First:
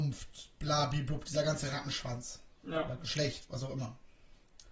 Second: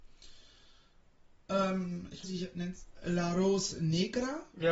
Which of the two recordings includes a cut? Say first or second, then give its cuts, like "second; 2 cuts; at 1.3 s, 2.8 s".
second; 2 cuts; at 2.2 s, 3.0 s